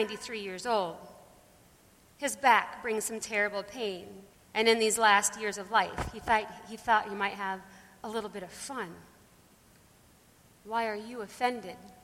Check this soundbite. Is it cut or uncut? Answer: cut